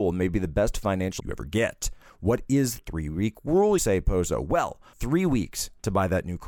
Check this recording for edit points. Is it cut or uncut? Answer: cut